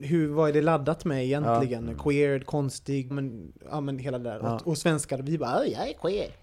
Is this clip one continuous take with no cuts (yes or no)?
no